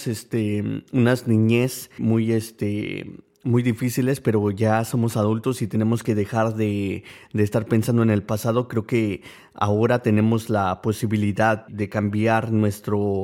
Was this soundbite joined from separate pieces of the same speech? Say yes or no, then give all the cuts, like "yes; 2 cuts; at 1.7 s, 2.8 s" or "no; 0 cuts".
yes; 2 cuts; at 2.0 s, 11.7 s